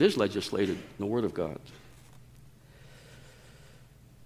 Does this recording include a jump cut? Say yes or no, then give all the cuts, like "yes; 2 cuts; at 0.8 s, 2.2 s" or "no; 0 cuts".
yes; 1 cut; at 1.0 s